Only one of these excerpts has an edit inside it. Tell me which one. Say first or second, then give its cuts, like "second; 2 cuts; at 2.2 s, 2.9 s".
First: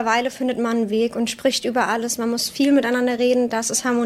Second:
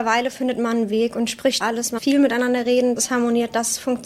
second; 3 cuts; at 1.6 s, 2.0 s, 3.0 s